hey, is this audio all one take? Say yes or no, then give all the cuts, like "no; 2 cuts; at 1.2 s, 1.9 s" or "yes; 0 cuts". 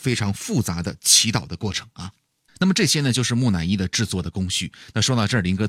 yes; 0 cuts